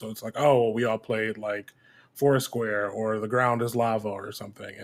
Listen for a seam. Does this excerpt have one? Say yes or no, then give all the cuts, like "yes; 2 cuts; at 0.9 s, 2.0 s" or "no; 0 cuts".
no; 0 cuts